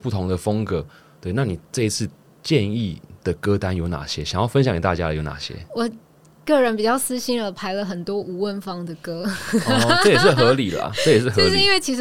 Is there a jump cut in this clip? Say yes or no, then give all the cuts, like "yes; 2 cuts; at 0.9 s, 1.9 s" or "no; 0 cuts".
no; 0 cuts